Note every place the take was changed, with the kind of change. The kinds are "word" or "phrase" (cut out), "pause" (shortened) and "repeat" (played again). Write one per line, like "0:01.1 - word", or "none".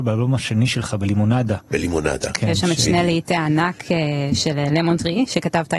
none